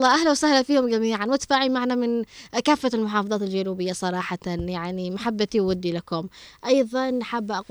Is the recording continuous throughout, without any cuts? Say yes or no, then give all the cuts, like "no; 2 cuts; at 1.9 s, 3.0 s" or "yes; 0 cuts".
yes; 0 cuts